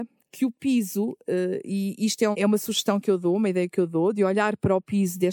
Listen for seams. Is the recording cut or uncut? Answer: cut